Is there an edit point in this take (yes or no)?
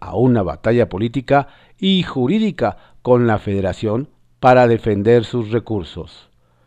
no